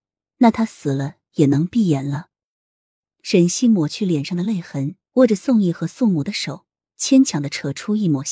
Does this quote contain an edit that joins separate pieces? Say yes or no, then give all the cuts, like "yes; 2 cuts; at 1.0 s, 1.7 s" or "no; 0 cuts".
yes; 1 cut; at 5.1 s